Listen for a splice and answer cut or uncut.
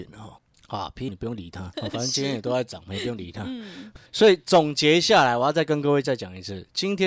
cut